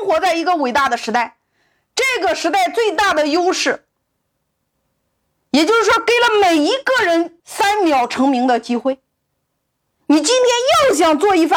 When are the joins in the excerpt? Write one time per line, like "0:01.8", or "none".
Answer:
0:07.4